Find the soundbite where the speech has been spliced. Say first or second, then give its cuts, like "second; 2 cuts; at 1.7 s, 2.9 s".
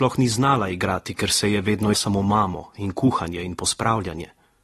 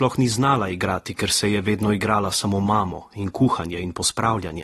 first; 1 cut; at 1.9 s